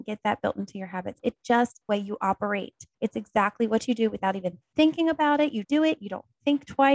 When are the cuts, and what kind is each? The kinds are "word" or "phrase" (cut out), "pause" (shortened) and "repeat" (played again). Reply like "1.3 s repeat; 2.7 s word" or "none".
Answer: 1.2 s word; 1.9 s phrase; 2.9 s pause; 5.6 s word